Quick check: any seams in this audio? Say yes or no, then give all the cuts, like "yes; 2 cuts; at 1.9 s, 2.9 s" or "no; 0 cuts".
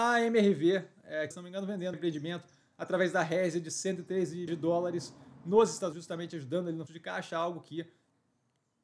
yes; 5 cuts; at 1.3 s, 1.9 s, 4.5 s, 5.9 s, 6.9 s